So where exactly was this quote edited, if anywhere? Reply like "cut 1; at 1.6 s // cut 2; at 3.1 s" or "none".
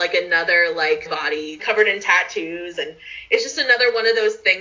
cut 1; at 1.1 s // cut 2; at 1.6 s